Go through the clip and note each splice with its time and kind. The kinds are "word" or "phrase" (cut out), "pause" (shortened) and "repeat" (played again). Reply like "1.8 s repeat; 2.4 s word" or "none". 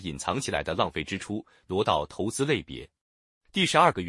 none